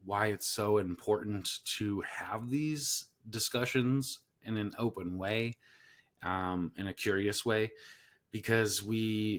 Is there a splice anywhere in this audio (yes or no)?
no